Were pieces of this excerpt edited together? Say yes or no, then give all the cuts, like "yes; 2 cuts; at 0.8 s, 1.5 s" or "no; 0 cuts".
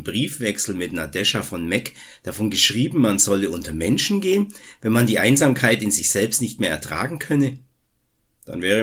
no; 0 cuts